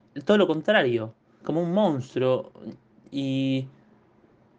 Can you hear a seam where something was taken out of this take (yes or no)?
yes